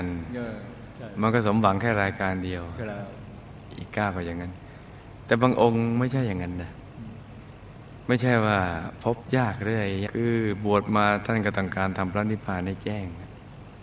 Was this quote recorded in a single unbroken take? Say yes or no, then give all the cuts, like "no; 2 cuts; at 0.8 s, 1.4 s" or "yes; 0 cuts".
no; 1 cut; at 10.1 s